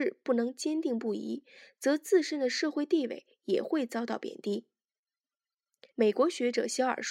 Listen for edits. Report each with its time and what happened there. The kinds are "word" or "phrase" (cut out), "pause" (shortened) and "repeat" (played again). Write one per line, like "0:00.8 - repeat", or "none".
0:05.9 - pause